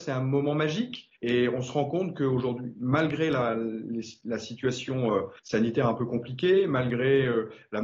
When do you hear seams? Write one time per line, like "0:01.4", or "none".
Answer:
0:01.2
0:05.4